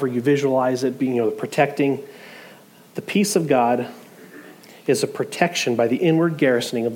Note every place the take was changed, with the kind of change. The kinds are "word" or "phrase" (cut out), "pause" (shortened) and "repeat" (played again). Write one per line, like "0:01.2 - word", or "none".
none